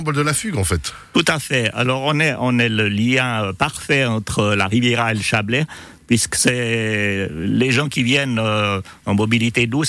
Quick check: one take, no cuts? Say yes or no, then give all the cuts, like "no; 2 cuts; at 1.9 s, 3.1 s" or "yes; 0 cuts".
yes; 0 cuts